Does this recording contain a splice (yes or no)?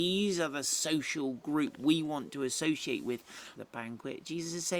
yes